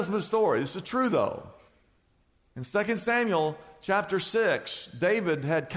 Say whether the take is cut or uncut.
uncut